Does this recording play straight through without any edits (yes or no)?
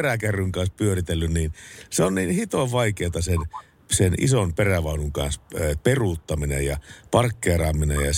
yes